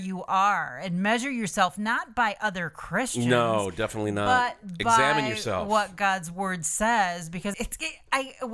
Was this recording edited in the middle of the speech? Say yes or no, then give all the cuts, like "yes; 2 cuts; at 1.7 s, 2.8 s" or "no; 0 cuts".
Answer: yes; 1 cut; at 7.5 s